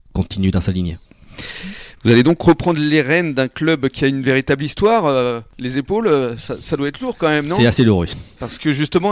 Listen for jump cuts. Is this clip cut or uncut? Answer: cut